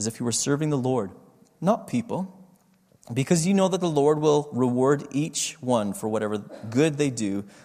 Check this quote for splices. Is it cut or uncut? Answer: uncut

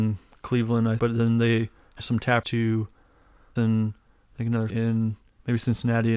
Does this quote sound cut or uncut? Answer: cut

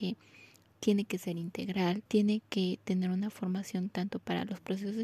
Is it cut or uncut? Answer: cut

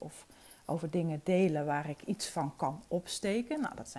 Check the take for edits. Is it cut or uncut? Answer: uncut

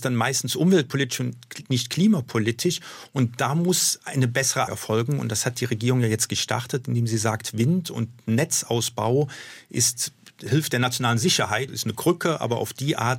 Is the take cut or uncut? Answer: cut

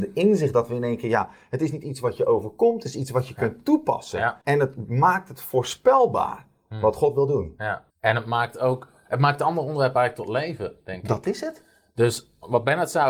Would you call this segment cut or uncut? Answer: cut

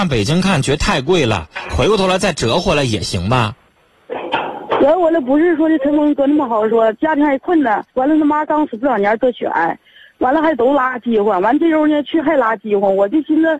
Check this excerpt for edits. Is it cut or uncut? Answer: cut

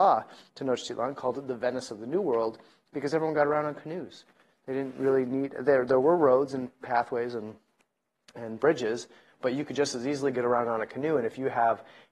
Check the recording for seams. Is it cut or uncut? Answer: uncut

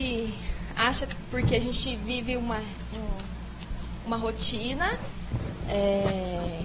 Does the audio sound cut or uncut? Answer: uncut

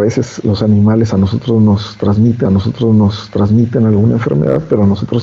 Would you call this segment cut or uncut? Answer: cut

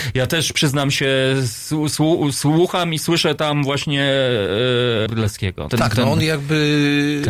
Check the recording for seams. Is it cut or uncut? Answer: cut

